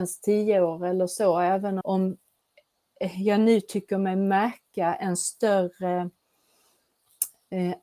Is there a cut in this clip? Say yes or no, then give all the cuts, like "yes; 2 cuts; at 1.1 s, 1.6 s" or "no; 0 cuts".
yes; 1 cut; at 1.8 s